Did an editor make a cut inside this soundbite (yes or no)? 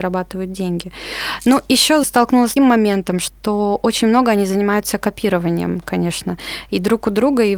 yes